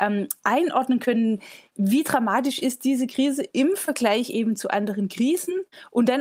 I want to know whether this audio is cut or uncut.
uncut